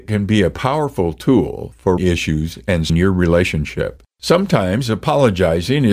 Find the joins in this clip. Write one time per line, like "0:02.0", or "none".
0:02.0
0:02.9
0:04.1